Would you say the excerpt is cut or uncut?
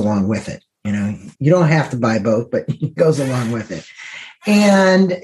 cut